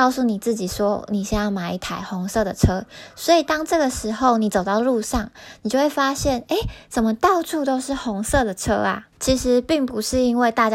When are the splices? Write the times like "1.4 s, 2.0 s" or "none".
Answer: 9.1 s